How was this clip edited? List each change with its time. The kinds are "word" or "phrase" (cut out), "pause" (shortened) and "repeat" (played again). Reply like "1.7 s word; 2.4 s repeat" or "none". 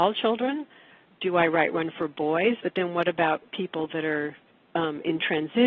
4.5 s pause